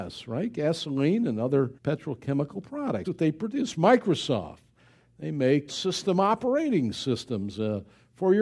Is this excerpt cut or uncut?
cut